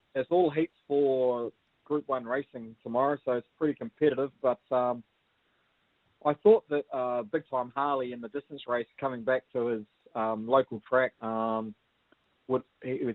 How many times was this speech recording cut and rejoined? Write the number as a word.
one